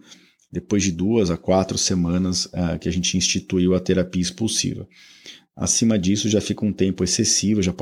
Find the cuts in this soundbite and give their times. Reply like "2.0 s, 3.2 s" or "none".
none